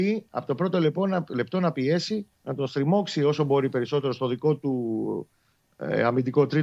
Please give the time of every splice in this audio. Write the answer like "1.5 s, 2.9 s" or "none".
2.3 s